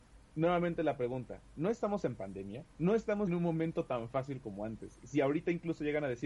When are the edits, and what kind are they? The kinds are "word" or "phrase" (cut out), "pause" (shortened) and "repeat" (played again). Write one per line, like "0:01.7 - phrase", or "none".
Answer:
0:03.3 - word